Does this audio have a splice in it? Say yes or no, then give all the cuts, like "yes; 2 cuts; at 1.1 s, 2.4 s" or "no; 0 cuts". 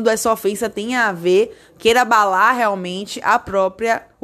no; 0 cuts